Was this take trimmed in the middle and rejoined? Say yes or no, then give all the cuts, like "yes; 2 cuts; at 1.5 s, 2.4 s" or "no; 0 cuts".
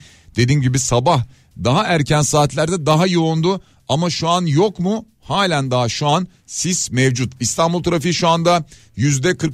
no; 0 cuts